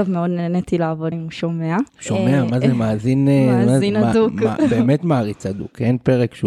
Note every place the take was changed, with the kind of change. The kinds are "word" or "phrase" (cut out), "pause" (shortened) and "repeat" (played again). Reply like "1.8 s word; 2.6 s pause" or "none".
1.1 s word; 1.9 s pause